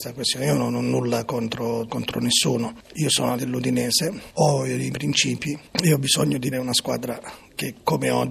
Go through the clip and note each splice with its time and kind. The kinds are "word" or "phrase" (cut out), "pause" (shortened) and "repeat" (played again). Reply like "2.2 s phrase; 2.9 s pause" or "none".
1.9 s word; 3.4 s word; 4.9 s word; 6.5 s word